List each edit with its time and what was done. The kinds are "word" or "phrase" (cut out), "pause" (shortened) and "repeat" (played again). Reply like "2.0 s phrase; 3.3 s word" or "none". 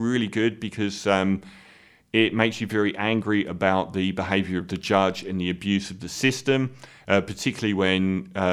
none